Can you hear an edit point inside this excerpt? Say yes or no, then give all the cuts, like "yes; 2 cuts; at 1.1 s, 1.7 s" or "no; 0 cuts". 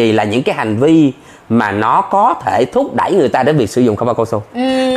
no; 0 cuts